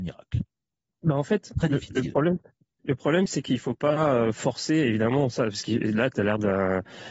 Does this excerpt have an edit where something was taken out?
no; 0 cuts

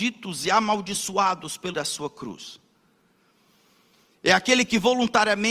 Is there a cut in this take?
yes; 1 cut; at 1.7 s

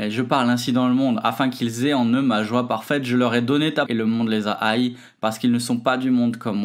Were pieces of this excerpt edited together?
yes; 1 cut; at 3.9 s

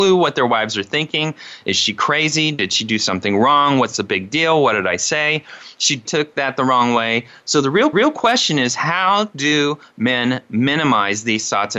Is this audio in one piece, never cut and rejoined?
no; 2 cuts; at 6.0 s, 7.9 s

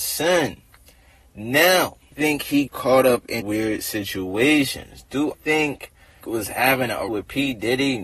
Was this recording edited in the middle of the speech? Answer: yes; 6 cuts; at 2.1 s, 2.7 s, 3.4 s, 5.3 s, 6.2 s, 7.1 s

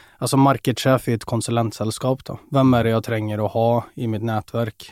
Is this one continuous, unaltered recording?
yes; 0 cuts

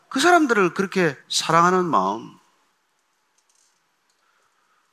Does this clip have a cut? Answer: yes; 1 cut; at 1.2 s

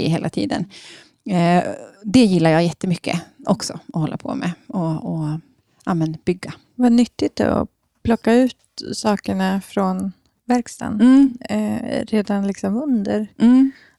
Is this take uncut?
no; 1 cut; at 1.9 s

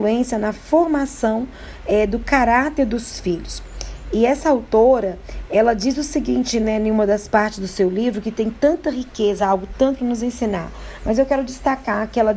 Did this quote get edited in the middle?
no; 0 cuts

